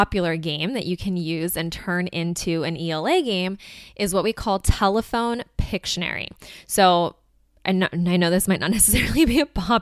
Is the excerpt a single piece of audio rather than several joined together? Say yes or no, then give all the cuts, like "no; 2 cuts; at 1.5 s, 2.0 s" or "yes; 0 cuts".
yes; 0 cuts